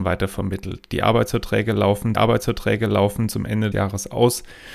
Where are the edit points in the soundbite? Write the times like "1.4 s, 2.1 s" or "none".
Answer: 2.1 s, 3.7 s